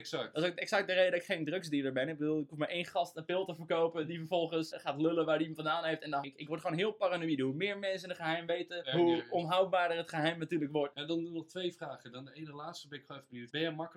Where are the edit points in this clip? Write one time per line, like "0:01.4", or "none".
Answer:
0:04.7
0:06.2